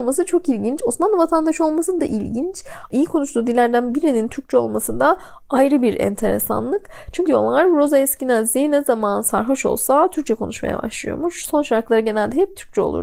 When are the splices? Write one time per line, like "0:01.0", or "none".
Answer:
0:02.0
0:07.3